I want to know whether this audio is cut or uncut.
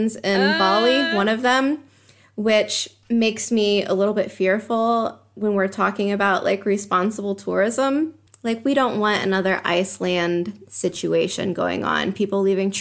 uncut